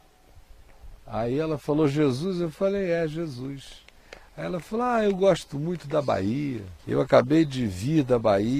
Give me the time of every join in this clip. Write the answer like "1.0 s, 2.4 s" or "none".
1.0 s, 6.8 s